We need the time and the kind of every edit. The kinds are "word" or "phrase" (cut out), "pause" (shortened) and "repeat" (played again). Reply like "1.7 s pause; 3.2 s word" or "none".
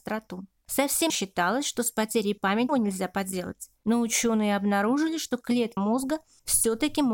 1.1 s word; 2.7 s word; 5.8 s word